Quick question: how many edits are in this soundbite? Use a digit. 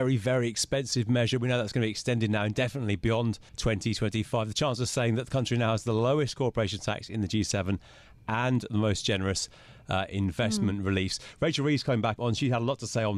2